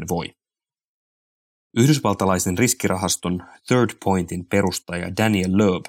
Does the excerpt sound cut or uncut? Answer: uncut